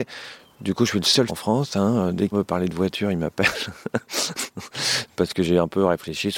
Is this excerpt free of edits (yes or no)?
no